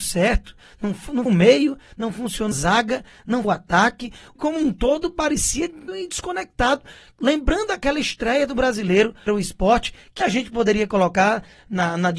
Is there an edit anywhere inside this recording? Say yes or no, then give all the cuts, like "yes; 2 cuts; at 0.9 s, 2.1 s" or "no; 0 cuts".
yes; 7 cuts; at 1.3 s, 2.5 s, 3.4 s, 4.4 s, 5.9 s, 9.3 s, 10.2 s